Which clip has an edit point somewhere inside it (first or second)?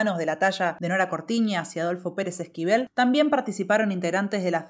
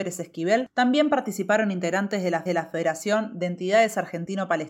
second